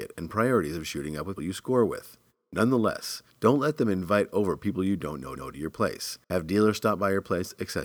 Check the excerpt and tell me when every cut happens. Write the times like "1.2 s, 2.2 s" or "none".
1.4 s, 3.3 s, 5.4 s, 6.2 s